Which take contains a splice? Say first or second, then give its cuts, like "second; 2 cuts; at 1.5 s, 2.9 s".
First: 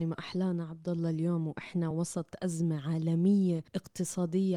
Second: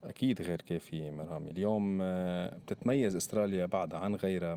second; 1 cut; at 1.5 s